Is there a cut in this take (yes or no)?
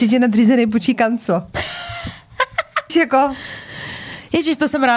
yes